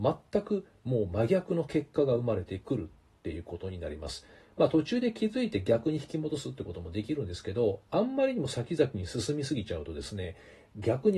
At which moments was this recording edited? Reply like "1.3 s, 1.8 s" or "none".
none